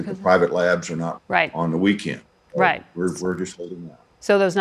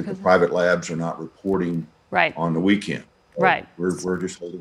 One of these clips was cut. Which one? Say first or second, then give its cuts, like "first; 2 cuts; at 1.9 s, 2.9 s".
first; 1 cut; at 1.2 s